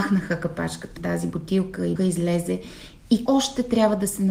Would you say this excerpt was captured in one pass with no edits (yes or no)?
no